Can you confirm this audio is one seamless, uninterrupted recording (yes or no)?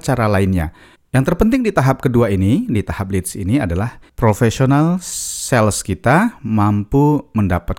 no